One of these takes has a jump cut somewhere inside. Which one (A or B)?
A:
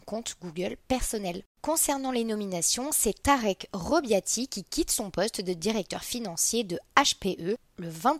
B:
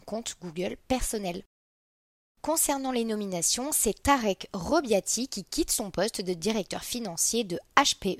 A